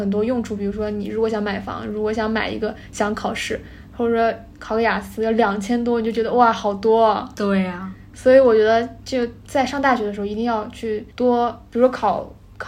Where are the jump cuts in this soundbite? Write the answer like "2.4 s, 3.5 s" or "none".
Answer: 11.1 s